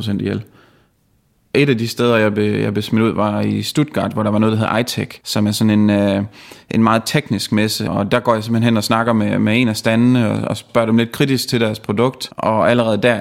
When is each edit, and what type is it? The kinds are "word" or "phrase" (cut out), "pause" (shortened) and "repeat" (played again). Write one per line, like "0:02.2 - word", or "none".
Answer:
none